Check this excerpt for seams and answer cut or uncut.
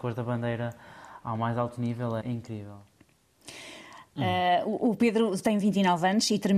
cut